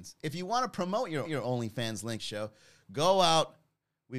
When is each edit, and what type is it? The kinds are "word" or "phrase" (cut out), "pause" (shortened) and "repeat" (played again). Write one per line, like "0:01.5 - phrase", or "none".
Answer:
0:01.2 - repeat
0:02.2 - phrase